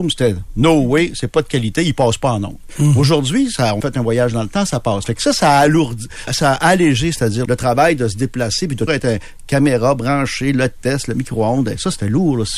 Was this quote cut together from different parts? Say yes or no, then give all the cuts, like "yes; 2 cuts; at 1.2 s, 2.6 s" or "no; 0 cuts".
yes; 4 cuts; at 3.8 s, 6.3 s, 7.5 s, 8.9 s